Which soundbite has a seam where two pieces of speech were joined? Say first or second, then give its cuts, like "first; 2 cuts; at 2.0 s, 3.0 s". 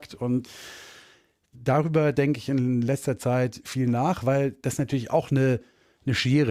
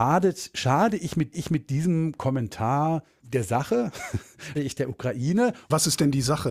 second; 3 cuts; at 1.3 s, 3.2 s, 4.5 s